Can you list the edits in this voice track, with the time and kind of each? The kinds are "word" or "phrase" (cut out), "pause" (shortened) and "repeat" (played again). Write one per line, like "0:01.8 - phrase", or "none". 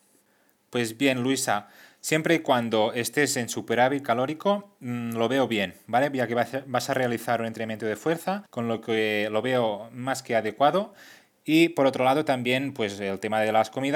0:08.5 - pause